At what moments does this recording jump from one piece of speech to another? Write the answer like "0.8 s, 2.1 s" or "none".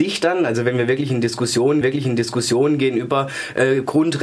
1.8 s